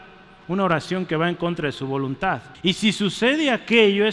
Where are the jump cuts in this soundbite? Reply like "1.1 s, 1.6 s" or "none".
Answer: 2.5 s